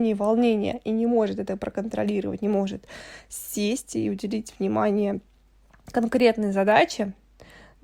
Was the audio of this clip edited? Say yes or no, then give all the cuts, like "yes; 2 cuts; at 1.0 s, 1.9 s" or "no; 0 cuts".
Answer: no; 0 cuts